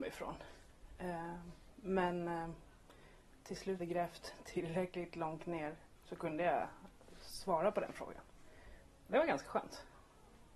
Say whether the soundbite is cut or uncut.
cut